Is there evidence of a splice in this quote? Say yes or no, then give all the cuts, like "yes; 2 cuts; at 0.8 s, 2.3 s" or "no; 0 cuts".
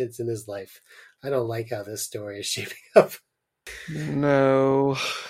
no; 0 cuts